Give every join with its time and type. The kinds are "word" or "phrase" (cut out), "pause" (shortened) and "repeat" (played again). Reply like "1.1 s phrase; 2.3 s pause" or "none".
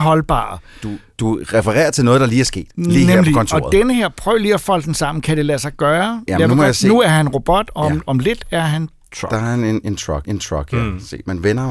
2.7 s pause; 10.2 s repeat